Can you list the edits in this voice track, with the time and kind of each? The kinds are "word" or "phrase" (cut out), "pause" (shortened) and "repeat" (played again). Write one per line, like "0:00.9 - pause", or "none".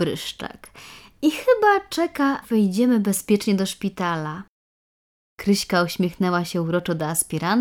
0:02.4 - word